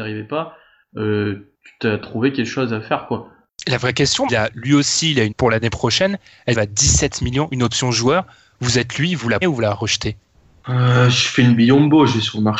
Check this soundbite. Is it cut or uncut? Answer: cut